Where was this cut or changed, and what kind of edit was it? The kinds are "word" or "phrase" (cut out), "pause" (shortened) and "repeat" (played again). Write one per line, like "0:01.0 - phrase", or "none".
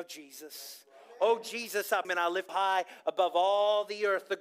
0:02.0 - phrase
0:02.5 - word